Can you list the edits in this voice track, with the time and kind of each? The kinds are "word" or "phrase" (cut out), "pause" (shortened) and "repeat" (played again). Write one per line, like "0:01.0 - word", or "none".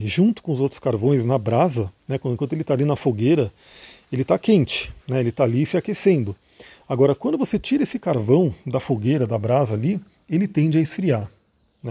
0:02.0 - pause
0:05.0 - pause